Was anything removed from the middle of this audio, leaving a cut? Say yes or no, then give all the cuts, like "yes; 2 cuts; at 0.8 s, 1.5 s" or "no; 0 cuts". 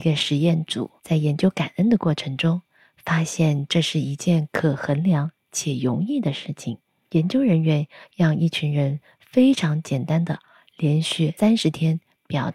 no; 0 cuts